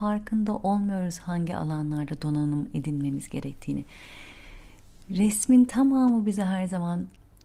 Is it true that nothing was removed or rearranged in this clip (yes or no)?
yes